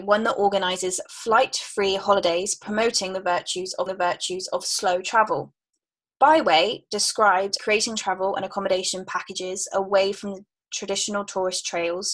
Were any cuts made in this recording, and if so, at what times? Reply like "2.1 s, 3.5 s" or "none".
3.9 s, 7.6 s